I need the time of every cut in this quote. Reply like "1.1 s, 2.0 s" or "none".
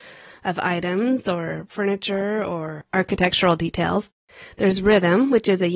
none